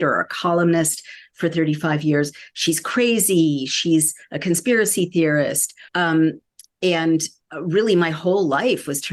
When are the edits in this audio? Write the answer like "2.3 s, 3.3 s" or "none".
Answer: 5.9 s